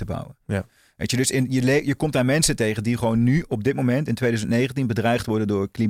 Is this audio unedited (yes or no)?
yes